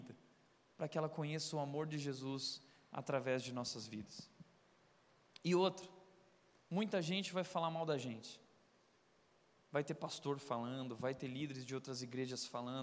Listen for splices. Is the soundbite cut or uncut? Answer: uncut